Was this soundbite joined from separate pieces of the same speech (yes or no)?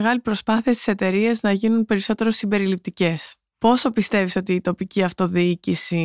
no